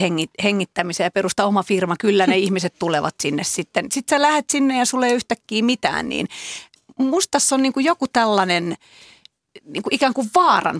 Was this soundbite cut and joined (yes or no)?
no